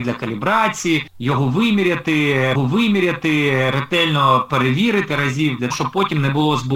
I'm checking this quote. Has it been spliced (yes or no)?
yes